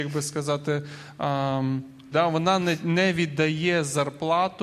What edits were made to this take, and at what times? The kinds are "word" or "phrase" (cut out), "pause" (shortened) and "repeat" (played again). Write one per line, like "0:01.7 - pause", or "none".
0:02.1 - word